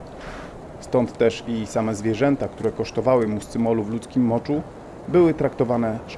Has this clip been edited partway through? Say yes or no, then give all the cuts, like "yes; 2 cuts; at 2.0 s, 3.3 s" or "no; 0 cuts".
no; 0 cuts